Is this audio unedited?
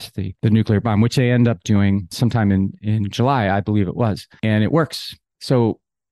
yes; 0 cuts

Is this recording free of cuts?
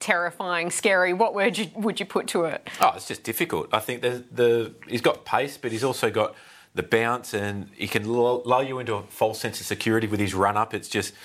yes; 0 cuts

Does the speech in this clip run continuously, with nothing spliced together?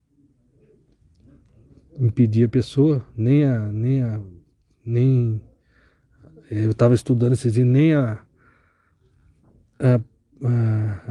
yes; 0 cuts

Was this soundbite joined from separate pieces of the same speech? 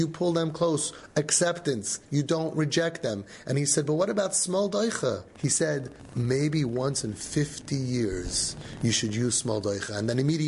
no; 0 cuts

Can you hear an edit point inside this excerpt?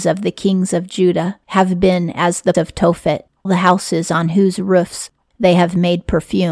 yes; 3 cuts; at 1.4 s, 2.5 s, 3.4 s

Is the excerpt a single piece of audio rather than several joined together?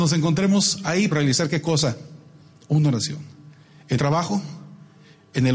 no; 2 cuts; at 1.1 s, 4.0 s

